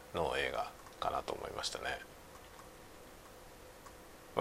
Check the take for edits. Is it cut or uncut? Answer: cut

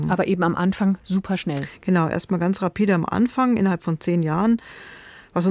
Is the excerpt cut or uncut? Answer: uncut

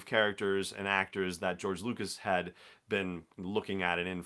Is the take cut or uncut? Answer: uncut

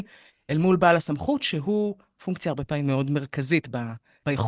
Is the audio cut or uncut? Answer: uncut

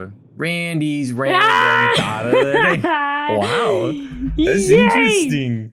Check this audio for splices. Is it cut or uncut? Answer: uncut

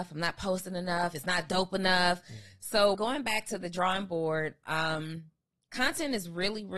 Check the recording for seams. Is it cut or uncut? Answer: cut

